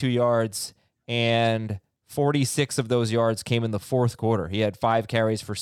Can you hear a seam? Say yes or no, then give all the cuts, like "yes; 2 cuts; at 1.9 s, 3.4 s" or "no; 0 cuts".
no; 0 cuts